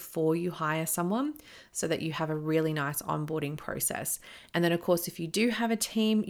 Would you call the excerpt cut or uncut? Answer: uncut